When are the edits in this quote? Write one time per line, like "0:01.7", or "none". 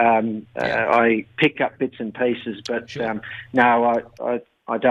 0:01.5